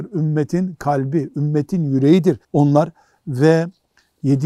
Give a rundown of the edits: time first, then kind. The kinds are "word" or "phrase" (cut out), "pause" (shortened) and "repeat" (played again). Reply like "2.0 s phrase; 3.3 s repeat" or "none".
2.4 s pause